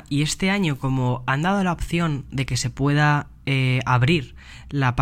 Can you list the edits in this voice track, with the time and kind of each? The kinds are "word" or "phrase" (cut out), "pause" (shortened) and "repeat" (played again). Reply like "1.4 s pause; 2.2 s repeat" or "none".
none